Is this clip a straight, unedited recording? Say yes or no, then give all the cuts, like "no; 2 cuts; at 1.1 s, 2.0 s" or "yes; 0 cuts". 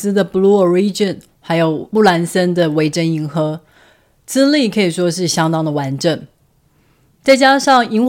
yes; 0 cuts